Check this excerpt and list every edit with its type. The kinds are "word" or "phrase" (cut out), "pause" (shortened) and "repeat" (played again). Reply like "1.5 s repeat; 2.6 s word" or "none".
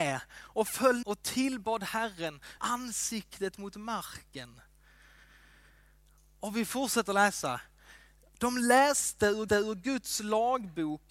1.0 s word; 2.6 s word; 9.5 s repeat